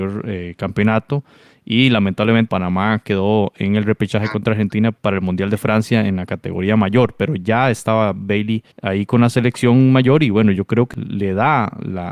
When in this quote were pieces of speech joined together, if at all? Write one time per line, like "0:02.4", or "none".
0:02.5
0:08.7